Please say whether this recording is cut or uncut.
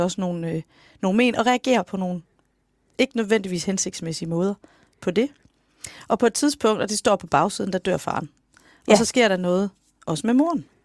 uncut